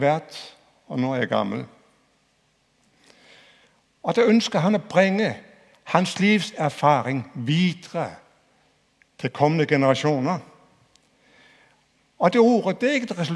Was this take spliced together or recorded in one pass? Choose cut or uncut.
uncut